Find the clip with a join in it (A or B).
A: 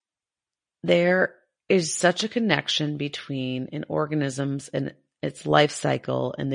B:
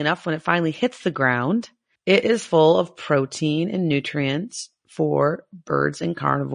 B